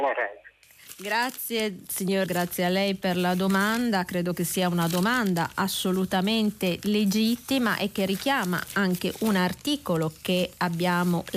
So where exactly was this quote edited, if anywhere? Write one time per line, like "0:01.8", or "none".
0:02.3